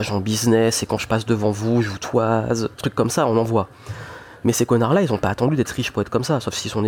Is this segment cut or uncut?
cut